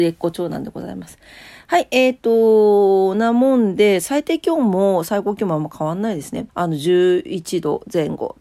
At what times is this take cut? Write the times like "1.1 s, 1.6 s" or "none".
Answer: 6.5 s